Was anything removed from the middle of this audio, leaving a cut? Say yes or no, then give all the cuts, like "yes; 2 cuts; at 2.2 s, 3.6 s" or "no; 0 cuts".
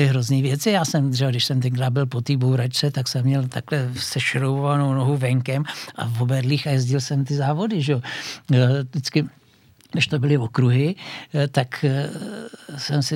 no; 0 cuts